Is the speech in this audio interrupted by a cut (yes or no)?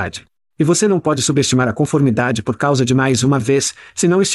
no